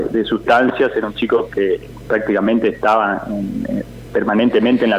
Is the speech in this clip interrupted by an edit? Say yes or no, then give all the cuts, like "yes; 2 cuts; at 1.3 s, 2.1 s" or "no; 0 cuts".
no; 0 cuts